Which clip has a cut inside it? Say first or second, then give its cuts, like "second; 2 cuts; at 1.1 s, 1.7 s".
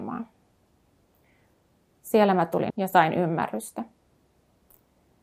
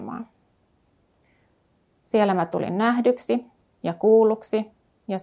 first; 1 cut; at 2.7 s